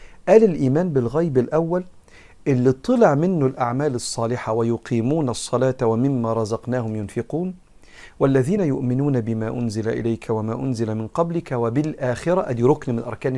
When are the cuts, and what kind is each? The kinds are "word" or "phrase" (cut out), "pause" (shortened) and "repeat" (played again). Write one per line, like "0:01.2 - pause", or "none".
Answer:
none